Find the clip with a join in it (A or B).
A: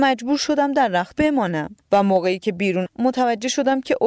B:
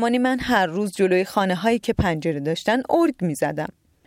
A